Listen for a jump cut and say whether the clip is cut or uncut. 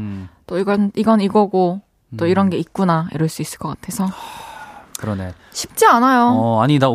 uncut